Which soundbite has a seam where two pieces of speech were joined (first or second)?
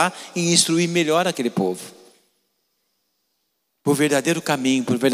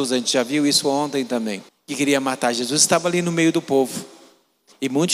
second